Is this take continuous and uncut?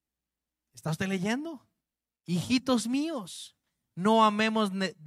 no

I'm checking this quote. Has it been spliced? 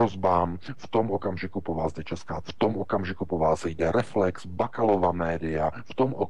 yes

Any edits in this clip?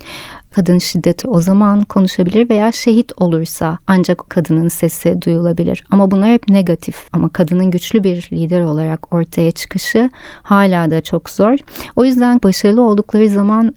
yes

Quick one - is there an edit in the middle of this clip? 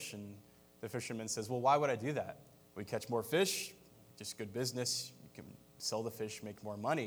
yes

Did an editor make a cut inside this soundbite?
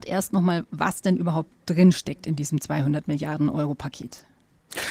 no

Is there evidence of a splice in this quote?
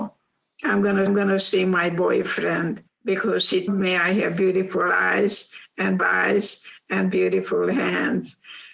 yes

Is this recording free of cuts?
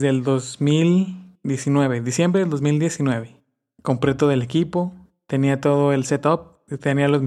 yes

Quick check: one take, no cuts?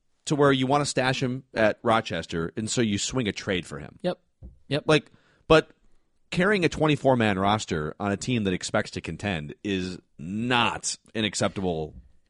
yes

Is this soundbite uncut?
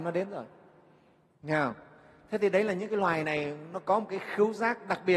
yes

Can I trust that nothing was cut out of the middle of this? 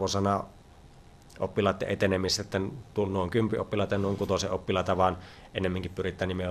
yes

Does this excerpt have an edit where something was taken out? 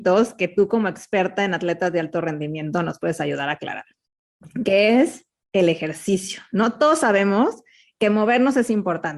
no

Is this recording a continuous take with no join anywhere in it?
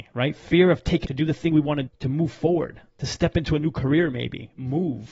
no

